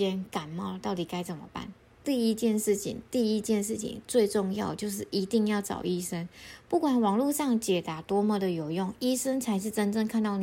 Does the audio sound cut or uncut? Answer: uncut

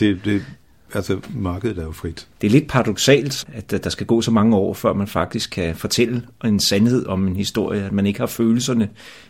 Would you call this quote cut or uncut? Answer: cut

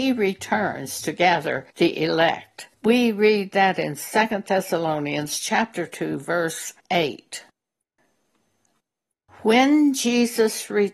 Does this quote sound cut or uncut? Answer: cut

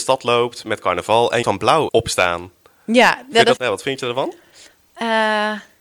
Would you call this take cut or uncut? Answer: cut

